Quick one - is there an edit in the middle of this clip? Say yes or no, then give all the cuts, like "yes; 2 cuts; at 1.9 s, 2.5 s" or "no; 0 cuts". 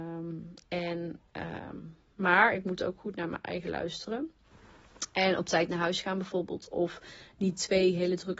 no; 0 cuts